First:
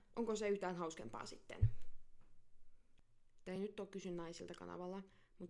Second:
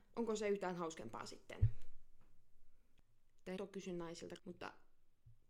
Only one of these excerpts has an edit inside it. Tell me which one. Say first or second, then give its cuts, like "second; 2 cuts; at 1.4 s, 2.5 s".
second; 2 cuts; at 3.6 s, 4.4 s